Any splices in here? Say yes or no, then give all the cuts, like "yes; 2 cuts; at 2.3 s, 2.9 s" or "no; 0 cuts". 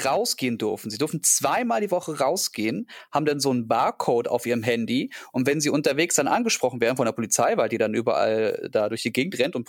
no; 0 cuts